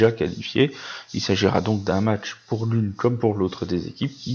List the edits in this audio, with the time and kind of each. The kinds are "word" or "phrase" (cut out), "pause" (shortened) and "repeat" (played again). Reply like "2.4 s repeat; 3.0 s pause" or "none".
none